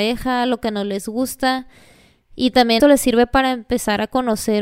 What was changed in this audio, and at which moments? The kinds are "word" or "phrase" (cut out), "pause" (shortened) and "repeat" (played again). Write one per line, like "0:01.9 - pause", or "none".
0:02.8 - word